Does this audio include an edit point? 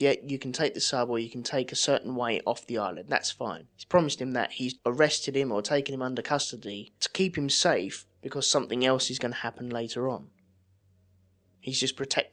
yes; 4 cuts; at 3.7 s, 4.8 s, 7.0 s, 8.1 s

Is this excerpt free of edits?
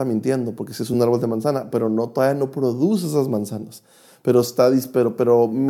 yes; 0 cuts

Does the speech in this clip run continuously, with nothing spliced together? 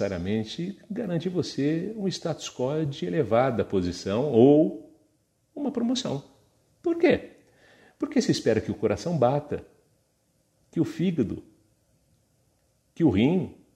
yes; 0 cuts

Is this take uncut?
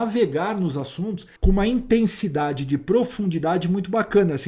no; 1 cut; at 1.4 s

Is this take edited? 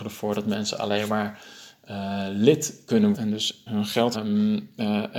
yes; 3 cuts; at 3.1 s, 3.7 s, 4.1 s

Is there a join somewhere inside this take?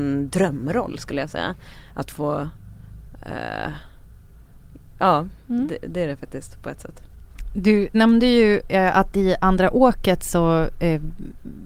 yes; 1 cut; at 7.9 s

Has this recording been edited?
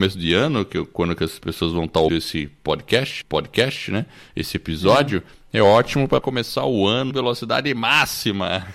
yes; 5 cuts; at 2.1 s, 3.2 s, 5.3 s, 6.2 s, 7.1 s

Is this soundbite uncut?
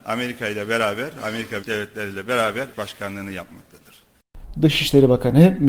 no; 2 cuts; at 1.6 s, 2.7 s

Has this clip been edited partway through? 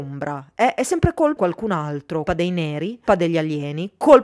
yes; 3 cuts; at 1.4 s, 2.3 s, 3.1 s

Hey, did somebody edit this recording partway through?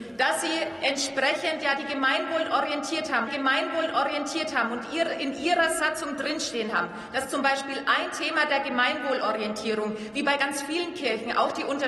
yes; 1 cut; at 3.3 s

